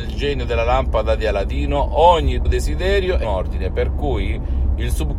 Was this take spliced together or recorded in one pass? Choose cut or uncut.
cut